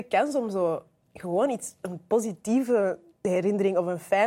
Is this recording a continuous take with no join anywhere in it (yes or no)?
yes